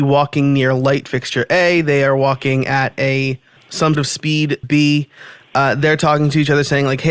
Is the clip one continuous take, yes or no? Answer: no